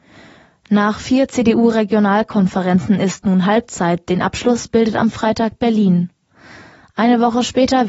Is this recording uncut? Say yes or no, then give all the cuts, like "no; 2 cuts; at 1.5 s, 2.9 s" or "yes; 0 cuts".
yes; 0 cuts